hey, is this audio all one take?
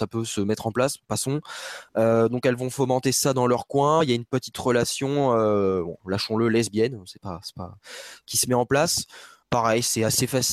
yes; 0 cuts

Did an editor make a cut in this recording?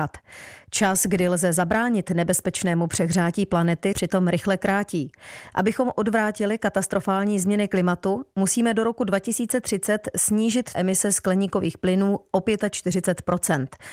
yes; 2 cuts; at 3.9 s, 10.7 s

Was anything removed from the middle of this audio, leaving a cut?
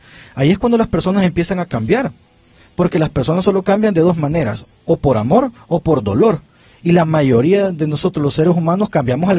no; 0 cuts

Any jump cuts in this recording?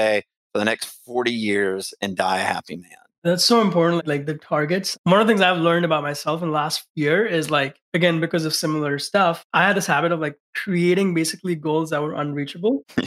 no; 0 cuts

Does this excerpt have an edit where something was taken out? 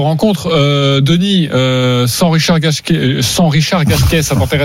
no; 0 cuts

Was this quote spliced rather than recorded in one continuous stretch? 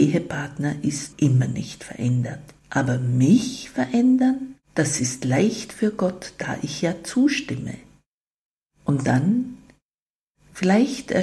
yes; 3 cuts; at 1.1 s, 2.6 s, 4.6 s

